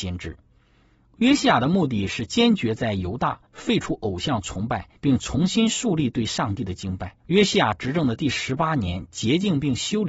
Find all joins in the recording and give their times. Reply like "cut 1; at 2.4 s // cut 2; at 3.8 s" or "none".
cut 1; at 3.5 s // cut 2; at 5.0 s // cut 3; at 7.2 s